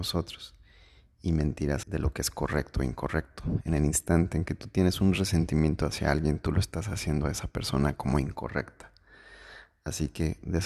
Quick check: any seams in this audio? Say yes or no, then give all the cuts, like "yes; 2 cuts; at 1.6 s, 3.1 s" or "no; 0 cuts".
yes; 1 cut; at 1.8 s